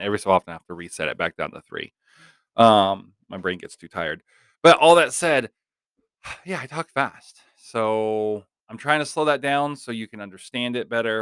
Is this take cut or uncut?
uncut